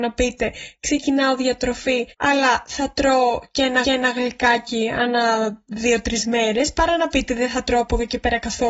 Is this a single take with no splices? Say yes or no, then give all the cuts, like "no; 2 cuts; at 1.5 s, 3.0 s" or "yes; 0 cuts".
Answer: no; 2 cuts; at 2.1 s, 3.8 s